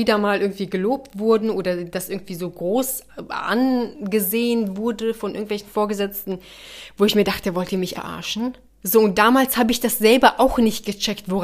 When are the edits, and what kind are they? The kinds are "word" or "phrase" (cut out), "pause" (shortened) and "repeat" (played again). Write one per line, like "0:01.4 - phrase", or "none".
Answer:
0:07.9 - word
0:08.7 - pause